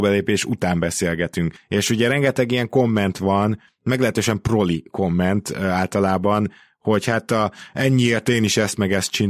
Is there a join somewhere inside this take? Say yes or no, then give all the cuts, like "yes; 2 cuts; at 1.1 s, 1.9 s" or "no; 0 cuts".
no; 0 cuts